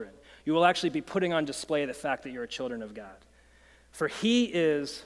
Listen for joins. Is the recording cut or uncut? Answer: uncut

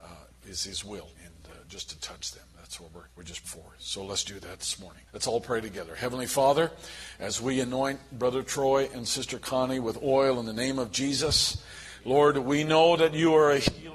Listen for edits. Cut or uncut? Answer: cut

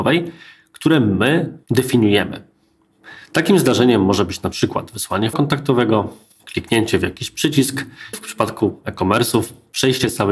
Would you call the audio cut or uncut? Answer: cut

